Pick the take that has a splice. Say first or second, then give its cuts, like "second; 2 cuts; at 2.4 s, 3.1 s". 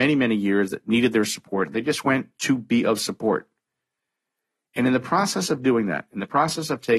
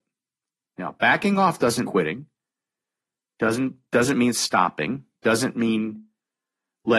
second; 2 cuts; at 1.8 s, 5.1 s